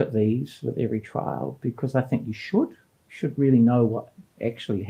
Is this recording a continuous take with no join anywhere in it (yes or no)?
yes